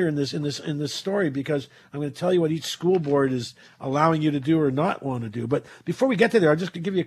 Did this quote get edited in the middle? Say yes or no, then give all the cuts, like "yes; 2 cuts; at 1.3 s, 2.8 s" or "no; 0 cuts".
no; 0 cuts